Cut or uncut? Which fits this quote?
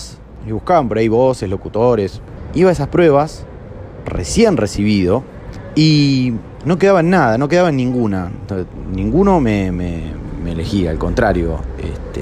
uncut